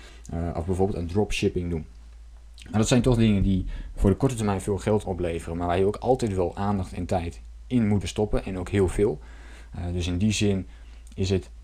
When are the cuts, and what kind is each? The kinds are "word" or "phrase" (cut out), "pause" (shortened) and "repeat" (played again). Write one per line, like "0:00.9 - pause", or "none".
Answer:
0:05.0 - word
0:08.0 - word